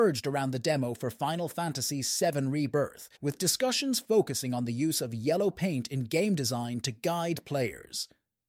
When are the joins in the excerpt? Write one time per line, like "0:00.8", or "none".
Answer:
0:03.2